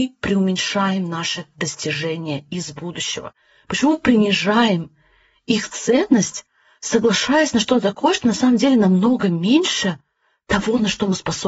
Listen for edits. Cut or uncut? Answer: uncut